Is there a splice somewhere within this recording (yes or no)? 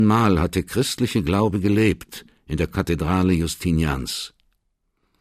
no